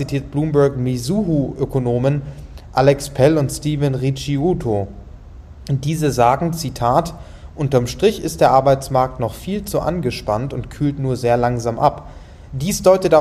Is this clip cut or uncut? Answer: uncut